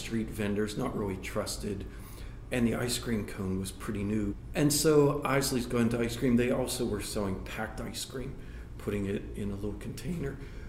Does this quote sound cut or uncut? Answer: uncut